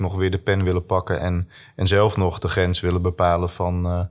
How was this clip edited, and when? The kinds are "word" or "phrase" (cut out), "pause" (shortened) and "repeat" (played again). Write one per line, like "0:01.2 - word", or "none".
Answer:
none

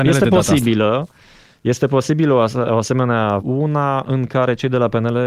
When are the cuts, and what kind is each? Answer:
0:03.4 - phrase

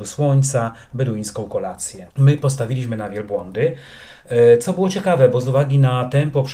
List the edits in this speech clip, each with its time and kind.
0:02.1 - pause

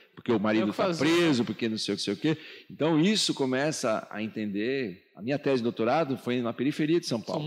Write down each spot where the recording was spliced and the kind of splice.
0:02.0 - repeat

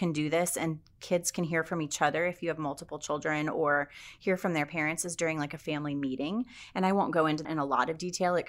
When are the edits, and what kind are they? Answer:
0:07.4 - word

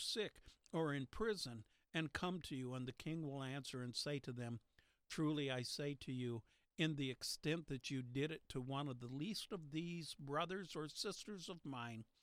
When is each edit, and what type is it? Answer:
none

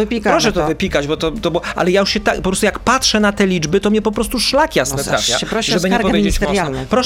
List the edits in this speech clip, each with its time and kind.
none

